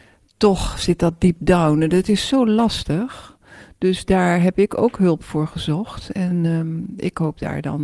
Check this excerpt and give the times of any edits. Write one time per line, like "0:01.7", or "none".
none

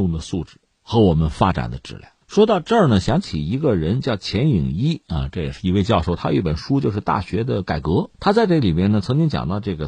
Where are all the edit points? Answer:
0:02.2
0:08.1

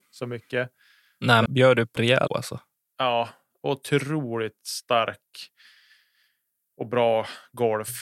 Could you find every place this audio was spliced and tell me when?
0:01.5
0:02.0
0:02.3

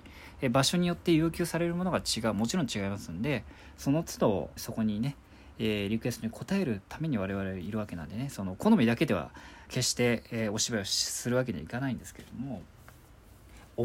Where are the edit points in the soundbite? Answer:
0:04.6
0:09.7

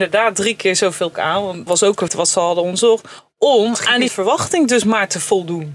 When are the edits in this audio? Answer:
0:01.1
0:01.7
0:02.1
0:04.1

